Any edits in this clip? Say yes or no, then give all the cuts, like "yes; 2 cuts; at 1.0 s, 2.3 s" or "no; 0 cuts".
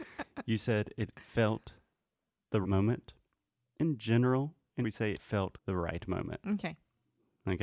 yes; 4 cuts; at 2.6 s, 4.8 s, 5.1 s, 5.5 s